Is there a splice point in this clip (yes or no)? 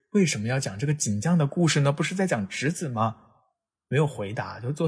no